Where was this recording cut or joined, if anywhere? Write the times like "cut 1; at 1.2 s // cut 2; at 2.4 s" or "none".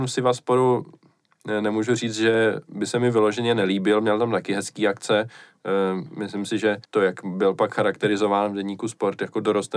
cut 1; at 6.8 s